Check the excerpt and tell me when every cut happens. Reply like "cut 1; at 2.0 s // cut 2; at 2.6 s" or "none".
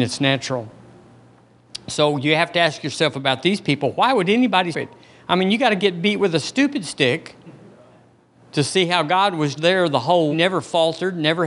cut 1; at 4.7 s // cut 2; at 9.6 s // cut 3; at 10.3 s